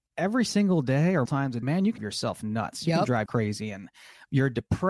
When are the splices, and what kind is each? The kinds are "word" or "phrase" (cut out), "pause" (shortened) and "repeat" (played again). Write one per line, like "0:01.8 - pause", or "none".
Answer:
0:01.3 - word
0:01.6 - word
0:02.0 - word
0:03.3 - word